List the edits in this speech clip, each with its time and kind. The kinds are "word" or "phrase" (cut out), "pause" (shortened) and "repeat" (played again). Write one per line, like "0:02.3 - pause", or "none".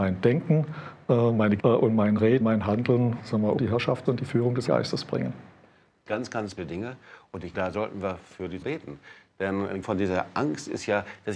0:01.6 - word
0:02.4 - word
0:03.6 - word
0:04.1 - word
0:04.7 - word
0:06.6 - word
0:07.5 - word
0:08.6 - word
0:09.8 - word